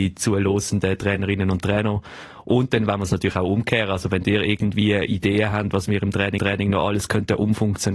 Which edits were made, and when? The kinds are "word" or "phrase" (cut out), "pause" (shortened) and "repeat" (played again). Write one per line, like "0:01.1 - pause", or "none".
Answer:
0:06.4 - repeat